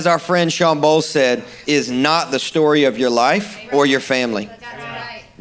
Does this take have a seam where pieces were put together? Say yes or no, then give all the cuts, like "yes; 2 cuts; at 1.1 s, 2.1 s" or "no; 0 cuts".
yes; 1 cut; at 1.6 s